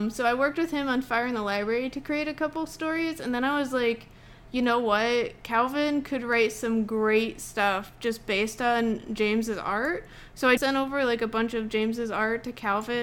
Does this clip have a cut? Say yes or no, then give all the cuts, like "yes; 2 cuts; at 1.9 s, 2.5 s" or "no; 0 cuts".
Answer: yes; 1 cut; at 10.6 s